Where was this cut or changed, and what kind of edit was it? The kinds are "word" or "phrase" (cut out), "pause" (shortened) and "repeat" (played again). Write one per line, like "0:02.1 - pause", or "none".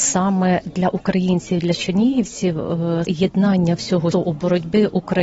0:03.0 - word
0:04.1 - word